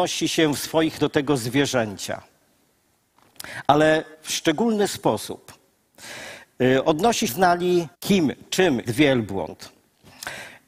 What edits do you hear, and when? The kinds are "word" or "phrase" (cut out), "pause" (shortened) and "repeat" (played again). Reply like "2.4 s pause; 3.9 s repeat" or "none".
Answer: 1.0 s word; 4.1 s pause; 7.3 s phrase; 7.9 s pause; 8.9 s word